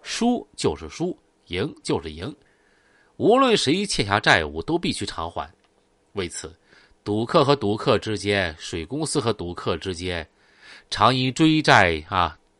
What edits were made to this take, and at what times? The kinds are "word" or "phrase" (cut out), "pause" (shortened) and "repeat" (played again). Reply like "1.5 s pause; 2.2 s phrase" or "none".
none